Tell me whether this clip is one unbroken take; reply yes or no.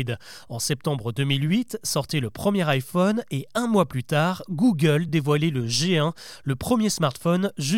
yes